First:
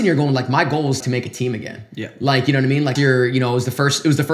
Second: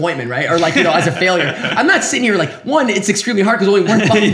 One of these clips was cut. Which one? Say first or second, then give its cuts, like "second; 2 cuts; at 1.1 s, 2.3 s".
first; 2 cuts; at 1.0 s, 3.0 s